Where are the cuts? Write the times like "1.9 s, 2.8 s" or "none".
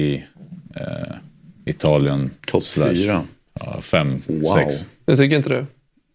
none